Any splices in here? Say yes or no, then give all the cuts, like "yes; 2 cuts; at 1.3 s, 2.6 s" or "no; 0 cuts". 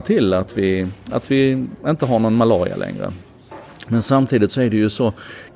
yes; 1 cut; at 1.8 s